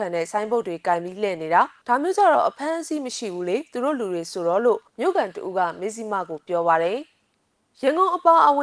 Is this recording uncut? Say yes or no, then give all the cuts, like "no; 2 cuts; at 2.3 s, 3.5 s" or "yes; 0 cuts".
no; 2 cuts; at 1.8 s, 4.9 s